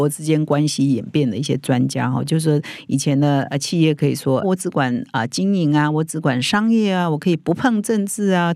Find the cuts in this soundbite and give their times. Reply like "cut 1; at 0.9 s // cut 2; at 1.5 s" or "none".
cut 1; at 4.4 s

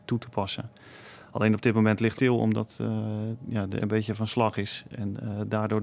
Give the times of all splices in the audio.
cut 1; at 2.2 s // cut 2; at 3.8 s

